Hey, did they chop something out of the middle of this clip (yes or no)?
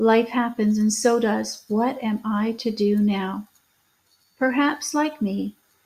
no